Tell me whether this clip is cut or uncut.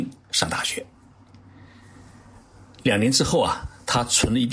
uncut